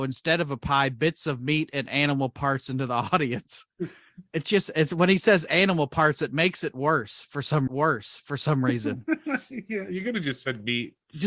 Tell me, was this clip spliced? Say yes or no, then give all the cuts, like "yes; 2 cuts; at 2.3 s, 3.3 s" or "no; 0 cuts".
yes; 1 cut; at 7.7 s